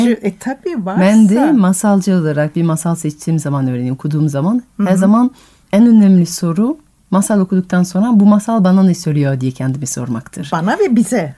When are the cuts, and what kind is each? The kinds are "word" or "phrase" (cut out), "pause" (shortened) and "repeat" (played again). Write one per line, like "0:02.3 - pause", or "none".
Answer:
none